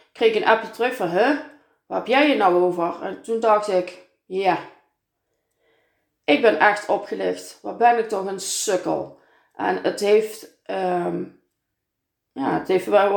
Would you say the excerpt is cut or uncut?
uncut